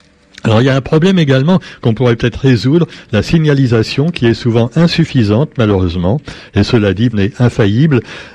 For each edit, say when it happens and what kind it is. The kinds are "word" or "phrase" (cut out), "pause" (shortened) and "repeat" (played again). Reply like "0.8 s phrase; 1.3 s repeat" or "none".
7.1 s word

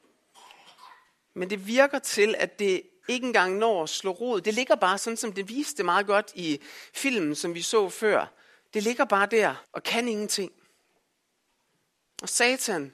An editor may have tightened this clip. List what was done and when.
9.6 s pause

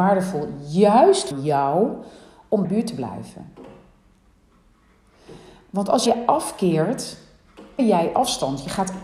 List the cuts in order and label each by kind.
1.3 s word; 2.6 s phrase; 6.1 s word; 7.8 s word

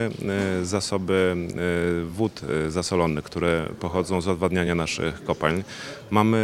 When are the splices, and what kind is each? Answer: none

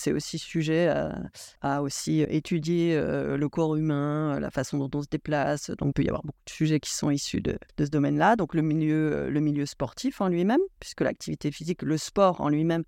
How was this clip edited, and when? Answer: 1.6 s pause; 2.2 s word; 5.9 s word; 7.7 s pause

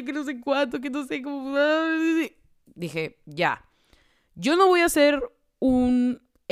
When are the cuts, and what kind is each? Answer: none

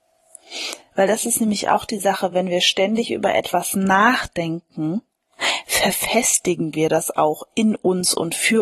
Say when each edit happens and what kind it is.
none

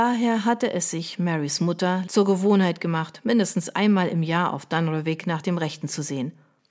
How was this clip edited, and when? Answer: 2.0 s phrase

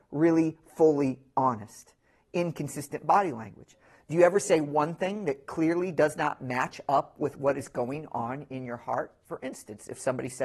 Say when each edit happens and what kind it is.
none

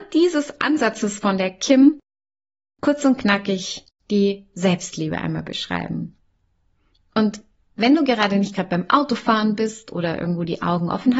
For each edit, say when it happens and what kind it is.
none

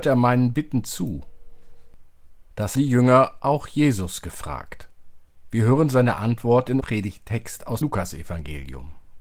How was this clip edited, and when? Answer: 2.7 s word; 6.8 s word; 7.8 s word

